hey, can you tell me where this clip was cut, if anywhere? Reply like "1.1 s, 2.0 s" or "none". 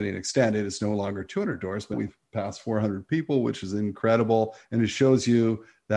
1.9 s